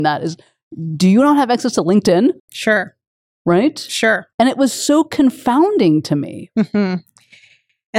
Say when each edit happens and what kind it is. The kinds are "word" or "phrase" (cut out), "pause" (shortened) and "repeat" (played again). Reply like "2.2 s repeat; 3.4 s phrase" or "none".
2.4 s pause; 4.3 s pause